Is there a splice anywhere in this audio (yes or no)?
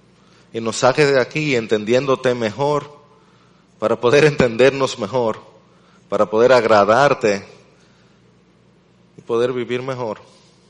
no